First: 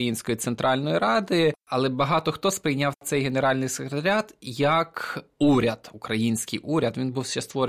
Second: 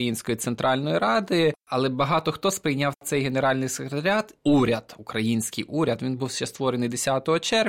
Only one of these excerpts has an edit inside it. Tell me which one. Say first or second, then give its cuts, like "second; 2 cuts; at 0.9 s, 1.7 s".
second; 1 cut; at 4.4 s